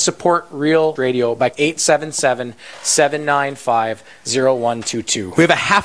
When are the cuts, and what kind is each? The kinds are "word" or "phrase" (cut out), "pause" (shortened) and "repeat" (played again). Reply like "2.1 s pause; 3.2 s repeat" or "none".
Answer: 1.0 s word; 1.5 s word